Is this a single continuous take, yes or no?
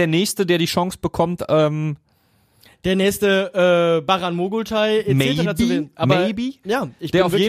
yes